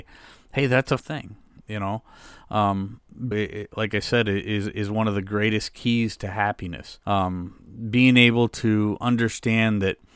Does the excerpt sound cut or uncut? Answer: cut